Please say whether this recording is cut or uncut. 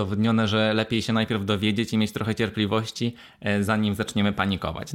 uncut